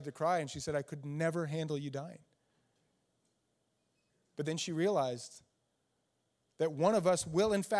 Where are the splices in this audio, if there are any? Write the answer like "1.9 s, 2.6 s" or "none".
none